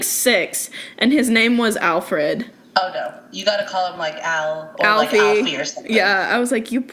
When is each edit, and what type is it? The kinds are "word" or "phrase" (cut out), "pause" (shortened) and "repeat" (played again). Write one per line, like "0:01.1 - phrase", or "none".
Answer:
none